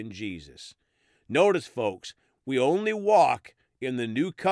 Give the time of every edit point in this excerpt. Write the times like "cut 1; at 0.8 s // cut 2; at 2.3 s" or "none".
none